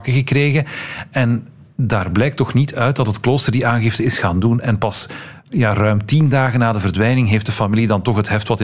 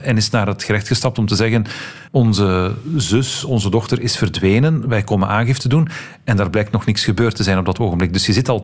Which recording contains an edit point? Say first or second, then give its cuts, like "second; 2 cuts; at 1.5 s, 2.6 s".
second; 1 cut; at 2.1 s